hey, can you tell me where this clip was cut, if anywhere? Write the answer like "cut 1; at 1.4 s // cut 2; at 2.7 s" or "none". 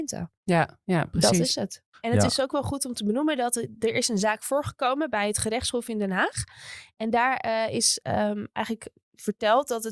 none